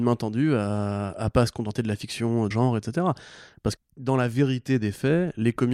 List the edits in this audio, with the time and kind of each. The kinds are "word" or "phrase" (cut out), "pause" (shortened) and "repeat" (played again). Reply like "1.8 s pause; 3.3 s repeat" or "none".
2.5 s word; 3.8 s word